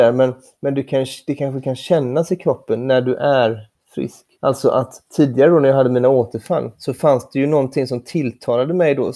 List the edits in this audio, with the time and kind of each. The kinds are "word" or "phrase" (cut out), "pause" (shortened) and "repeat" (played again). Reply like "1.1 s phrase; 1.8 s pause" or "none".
4.3 s pause; 5.1 s pause; 6.7 s pause